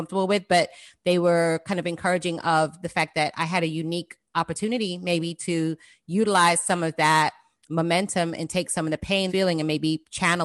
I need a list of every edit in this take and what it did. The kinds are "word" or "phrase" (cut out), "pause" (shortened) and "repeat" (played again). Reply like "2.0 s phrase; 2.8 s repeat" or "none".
9.3 s phrase